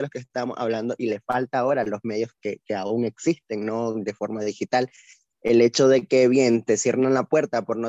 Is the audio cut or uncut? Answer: uncut